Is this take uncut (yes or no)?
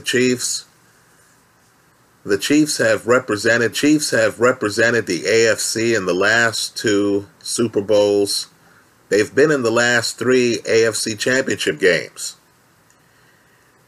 no